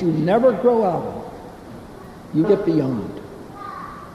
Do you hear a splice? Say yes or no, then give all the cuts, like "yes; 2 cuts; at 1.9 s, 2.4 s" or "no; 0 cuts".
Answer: yes; 1 cut; at 2.4 s